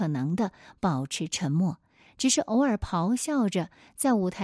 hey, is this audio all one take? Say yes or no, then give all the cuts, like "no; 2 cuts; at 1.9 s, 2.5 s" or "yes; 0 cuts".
yes; 0 cuts